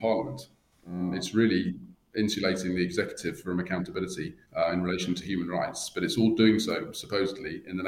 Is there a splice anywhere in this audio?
yes; 1 cut; at 4.4 s

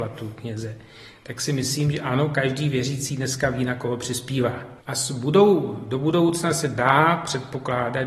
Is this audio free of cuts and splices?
no; 1 cut; at 4.8 s

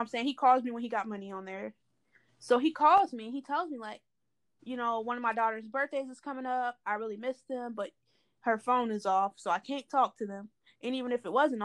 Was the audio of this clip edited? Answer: no; 0 cuts

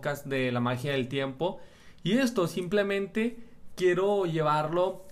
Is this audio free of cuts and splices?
yes; 0 cuts

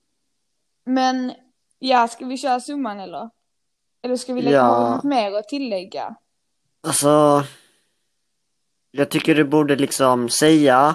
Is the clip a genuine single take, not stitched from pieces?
yes; 0 cuts

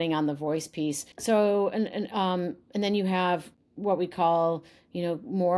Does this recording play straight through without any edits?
no; 2 cuts; at 1.1 s, 3.5 s

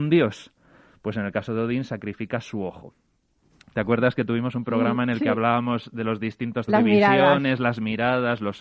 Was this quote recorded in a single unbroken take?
no; 1 cut; at 6.7 s

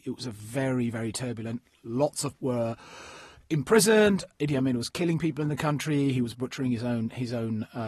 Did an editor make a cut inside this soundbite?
yes; 1 cut; at 2.4 s

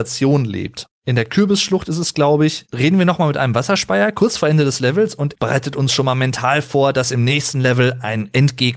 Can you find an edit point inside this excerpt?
yes; 2 cuts; at 0.9 s, 5.3 s

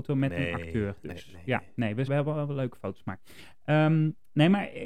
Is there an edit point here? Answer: yes; 1 cut; at 2.1 s

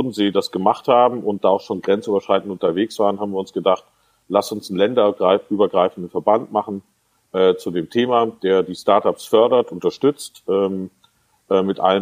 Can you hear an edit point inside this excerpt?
no; 0 cuts

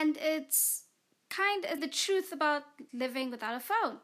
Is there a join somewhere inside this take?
yes; 2 cuts; at 1.8 s, 2.9 s

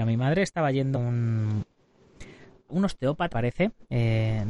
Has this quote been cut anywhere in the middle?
yes; 3 cuts; at 1.0 s, 2.7 s, 3.3 s

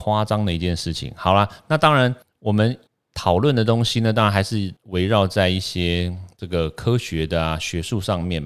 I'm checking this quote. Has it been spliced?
yes; 3 cuts; at 2.2 s, 2.9 s, 4.8 s

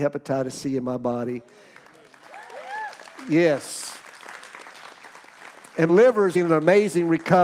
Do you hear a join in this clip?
yes; 2 cuts; at 5.9 s, 6.3 s

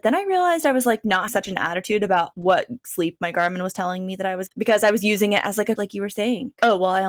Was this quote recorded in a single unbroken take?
no; 3 cuts; at 1.3 s, 4.5 s, 5.8 s

